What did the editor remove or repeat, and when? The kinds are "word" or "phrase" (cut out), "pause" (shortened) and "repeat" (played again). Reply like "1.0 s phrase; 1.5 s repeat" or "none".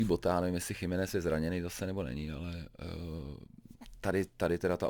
none